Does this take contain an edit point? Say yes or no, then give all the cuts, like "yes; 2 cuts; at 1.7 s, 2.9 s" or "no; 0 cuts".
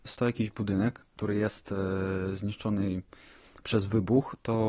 no; 0 cuts